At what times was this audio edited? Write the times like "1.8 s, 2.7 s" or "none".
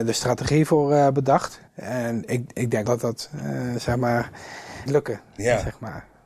1.7 s, 2.8 s, 4.9 s

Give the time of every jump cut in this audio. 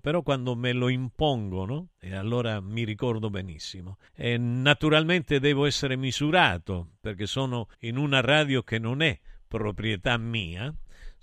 1.9 s, 4.1 s, 7.7 s

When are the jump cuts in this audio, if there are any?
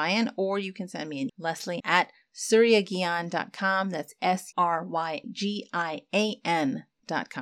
1.3 s, 1.8 s, 4.5 s, 5.2 s

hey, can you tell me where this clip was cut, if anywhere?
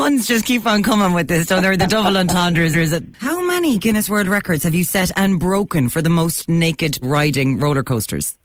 2.7 s, 7.0 s

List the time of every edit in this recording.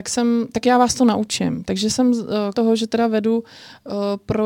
2.5 s

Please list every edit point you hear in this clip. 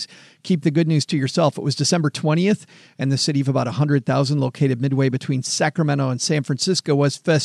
none

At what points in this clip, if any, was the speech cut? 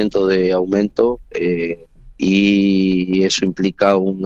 2.1 s

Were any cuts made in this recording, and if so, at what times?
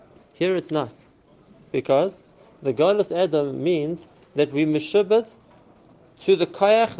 none

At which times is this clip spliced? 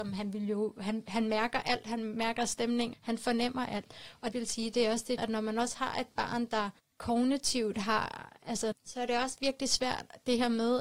2.9 s, 4.3 s, 5.2 s, 6.8 s, 8.7 s

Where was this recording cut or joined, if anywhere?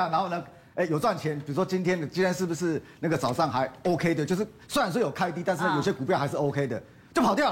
none

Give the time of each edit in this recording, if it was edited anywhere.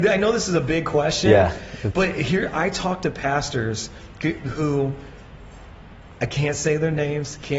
none

